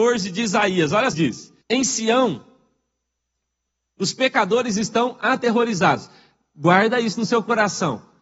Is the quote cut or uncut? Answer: cut